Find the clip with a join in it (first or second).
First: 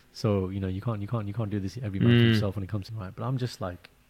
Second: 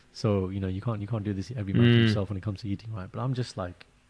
first